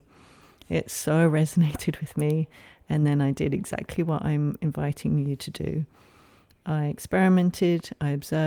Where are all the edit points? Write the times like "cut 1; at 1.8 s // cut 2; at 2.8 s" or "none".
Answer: none